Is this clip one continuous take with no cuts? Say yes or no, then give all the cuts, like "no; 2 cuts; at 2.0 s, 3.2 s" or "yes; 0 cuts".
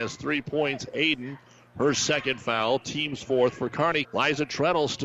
no; 1 cut; at 4.0 s